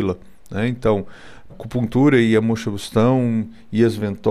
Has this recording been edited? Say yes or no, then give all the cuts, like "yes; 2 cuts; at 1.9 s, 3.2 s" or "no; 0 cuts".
yes; 1 cut; at 1.5 s